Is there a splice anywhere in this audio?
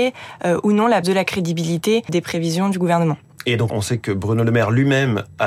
yes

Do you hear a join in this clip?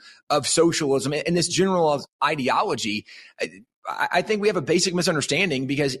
no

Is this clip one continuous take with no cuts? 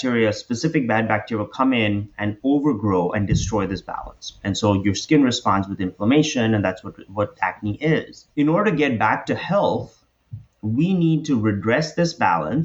no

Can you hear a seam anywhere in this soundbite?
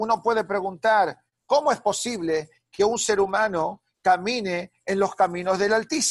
no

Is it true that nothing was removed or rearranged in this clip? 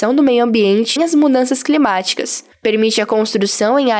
no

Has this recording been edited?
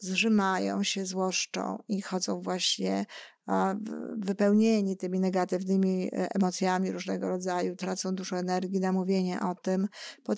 no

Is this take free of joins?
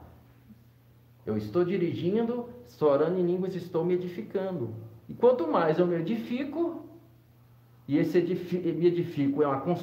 yes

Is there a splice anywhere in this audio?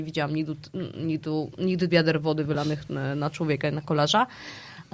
yes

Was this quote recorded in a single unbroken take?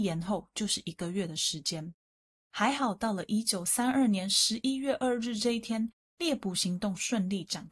yes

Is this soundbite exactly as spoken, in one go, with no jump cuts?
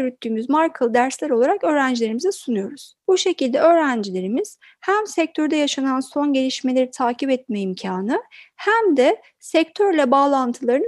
yes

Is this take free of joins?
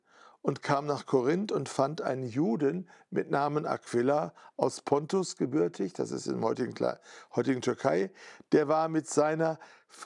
yes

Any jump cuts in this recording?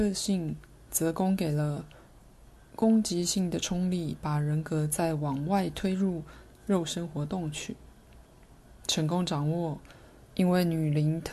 no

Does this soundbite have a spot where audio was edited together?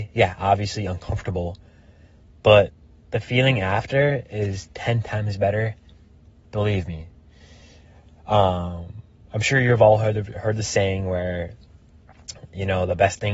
no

